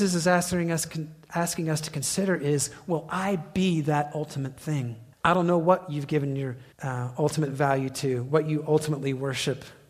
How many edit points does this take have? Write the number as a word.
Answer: two